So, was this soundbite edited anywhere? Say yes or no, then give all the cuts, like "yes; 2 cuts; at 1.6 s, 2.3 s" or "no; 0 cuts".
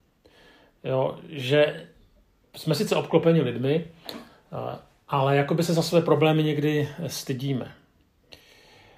no; 0 cuts